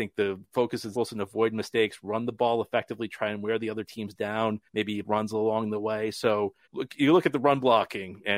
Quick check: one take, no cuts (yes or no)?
no